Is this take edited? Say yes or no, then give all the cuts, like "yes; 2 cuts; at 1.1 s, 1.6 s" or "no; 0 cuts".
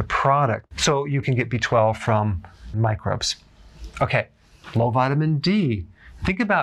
yes; 2 cuts; at 1.2 s, 2.7 s